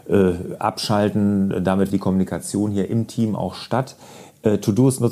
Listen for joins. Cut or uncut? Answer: cut